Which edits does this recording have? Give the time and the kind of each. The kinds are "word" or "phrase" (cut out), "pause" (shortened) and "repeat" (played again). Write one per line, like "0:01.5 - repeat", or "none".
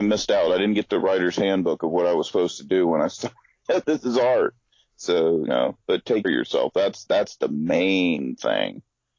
0:03.7 - word
0:05.5 - word
0:06.2 - word